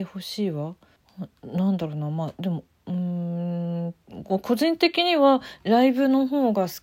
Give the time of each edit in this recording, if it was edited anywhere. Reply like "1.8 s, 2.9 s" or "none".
1.0 s